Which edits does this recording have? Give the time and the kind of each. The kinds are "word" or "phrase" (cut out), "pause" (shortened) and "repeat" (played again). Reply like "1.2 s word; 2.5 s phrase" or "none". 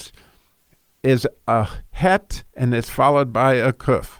2.5 s pause